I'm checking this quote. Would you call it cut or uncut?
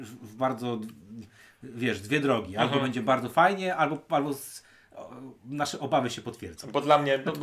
uncut